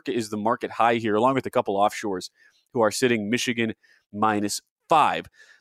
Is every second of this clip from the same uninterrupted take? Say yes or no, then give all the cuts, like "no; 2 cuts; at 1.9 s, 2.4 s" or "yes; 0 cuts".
yes; 0 cuts